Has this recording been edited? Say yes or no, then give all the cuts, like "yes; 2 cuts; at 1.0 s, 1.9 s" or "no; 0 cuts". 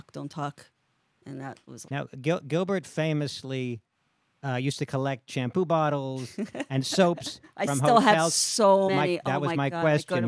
yes; 2 cuts; at 1.9 s, 8.9 s